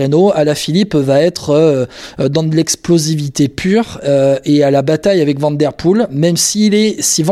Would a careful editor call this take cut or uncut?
uncut